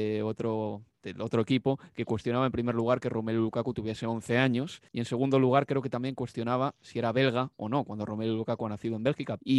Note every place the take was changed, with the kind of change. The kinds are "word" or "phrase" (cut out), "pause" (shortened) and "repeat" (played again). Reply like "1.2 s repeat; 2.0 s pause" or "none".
4.9 s pause